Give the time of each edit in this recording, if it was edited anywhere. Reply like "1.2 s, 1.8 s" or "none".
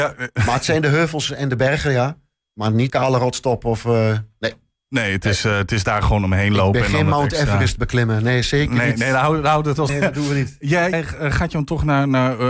2.9 s, 9.9 s, 10.9 s